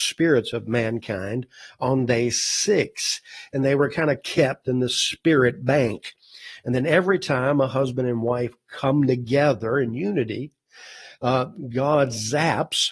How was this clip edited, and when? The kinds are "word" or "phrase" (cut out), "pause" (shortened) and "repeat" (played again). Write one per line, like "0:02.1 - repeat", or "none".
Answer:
none